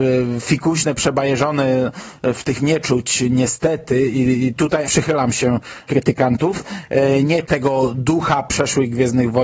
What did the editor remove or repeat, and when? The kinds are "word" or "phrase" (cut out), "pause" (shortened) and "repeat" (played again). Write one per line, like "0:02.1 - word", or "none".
0:02.6 - word
0:04.8 - word
0:05.9 - word
0:07.4 - word